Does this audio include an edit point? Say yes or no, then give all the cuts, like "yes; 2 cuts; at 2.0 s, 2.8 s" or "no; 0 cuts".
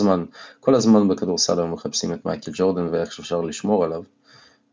no; 0 cuts